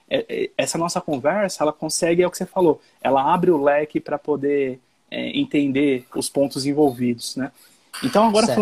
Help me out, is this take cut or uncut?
uncut